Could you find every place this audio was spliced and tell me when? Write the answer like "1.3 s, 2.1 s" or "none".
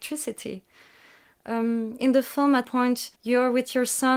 2.0 s, 2.6 s, 3.2 s